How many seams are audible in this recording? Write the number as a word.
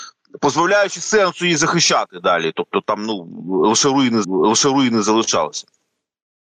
one